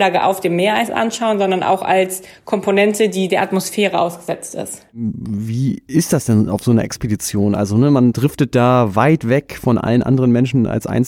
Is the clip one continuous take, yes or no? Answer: yes